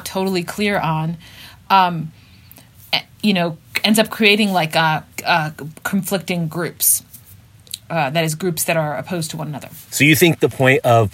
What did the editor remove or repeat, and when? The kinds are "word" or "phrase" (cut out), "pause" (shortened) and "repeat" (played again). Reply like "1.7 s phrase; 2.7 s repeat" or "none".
5.1 s pause; 9.9 s pause